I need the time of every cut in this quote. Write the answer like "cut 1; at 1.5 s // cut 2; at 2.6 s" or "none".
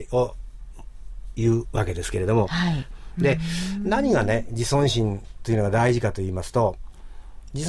none